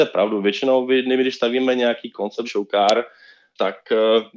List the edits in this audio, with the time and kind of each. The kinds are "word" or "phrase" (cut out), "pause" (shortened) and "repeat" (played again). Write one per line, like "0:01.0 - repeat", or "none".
0:02.4 - word